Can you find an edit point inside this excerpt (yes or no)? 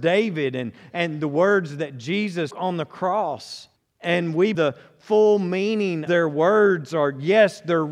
yes